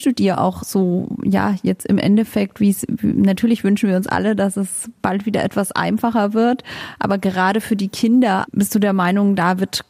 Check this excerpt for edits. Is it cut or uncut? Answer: cut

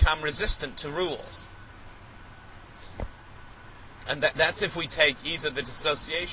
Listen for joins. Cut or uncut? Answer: uncut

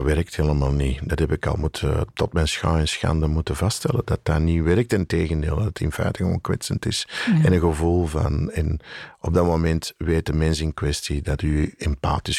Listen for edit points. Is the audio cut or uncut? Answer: uncut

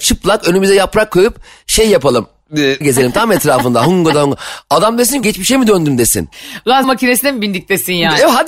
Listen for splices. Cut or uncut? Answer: cut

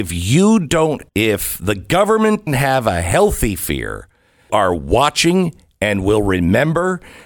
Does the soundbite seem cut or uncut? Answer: cut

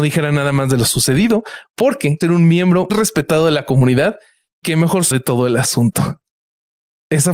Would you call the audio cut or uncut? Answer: cut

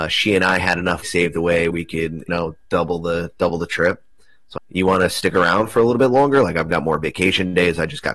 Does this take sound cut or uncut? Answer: cut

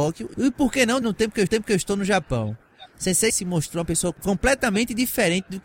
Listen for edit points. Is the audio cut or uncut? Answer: cut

